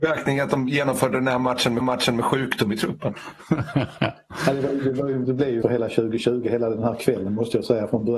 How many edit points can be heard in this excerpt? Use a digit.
3